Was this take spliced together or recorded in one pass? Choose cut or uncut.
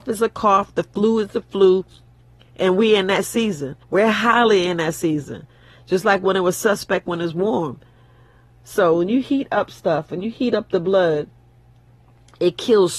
cut